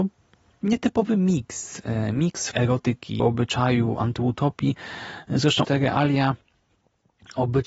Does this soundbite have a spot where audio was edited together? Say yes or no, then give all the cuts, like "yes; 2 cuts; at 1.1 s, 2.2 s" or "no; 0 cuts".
yes; 3 cuts; at 2.5 s, 3.2 s, 5.6 s